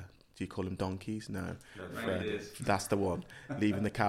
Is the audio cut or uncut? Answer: uncut